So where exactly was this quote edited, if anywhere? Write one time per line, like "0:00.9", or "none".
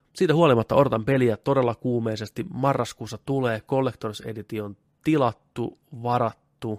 none